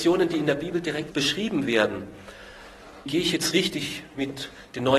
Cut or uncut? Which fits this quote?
cut